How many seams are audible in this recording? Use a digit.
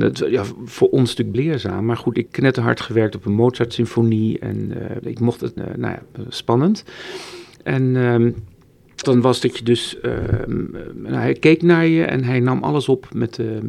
5